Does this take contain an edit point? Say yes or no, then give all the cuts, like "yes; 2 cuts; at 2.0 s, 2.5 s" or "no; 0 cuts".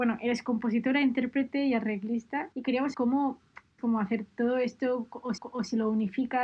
yes; 4 cuts; at 2.5 s, 2.9 s, 3.8 s, 5.4 s